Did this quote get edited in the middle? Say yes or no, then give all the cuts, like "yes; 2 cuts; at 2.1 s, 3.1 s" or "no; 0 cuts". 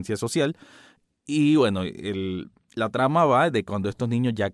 no; 0 cuts